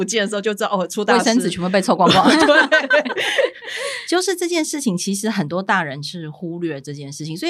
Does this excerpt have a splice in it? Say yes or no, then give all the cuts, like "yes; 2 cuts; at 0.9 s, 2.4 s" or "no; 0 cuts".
no; 0 cuts